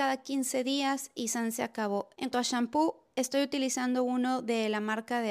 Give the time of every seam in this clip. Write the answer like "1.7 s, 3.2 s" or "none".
2.3 s

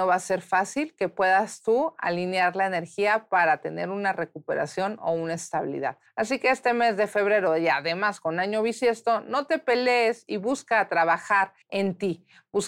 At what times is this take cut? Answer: 6.1 s, 11.6 s

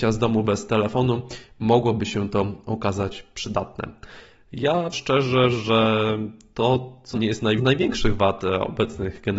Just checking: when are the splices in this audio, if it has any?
4.9 s, 7.1 s, 7.6 s

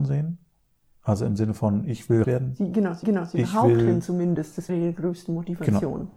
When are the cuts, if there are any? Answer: 2.2 s, 3.0 s, 4.7 s

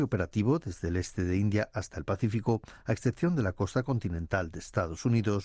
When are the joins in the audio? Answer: none

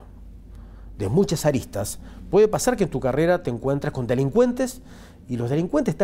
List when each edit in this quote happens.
none

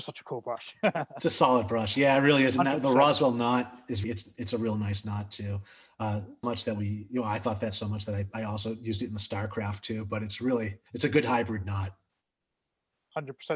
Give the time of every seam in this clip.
4.0 s, 6.4 s, 10.9 s

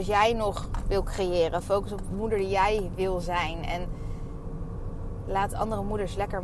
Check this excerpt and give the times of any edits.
none

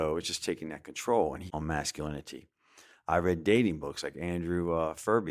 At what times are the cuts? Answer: 1.5 s

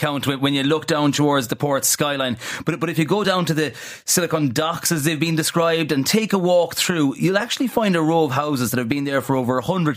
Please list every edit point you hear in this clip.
none

